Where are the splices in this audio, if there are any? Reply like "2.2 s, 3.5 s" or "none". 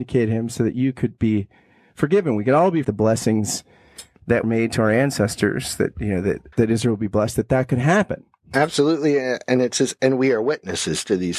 2.8 s, 4.4 s, 6.5 s